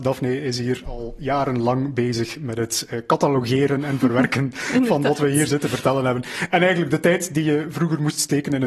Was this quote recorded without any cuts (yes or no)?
yes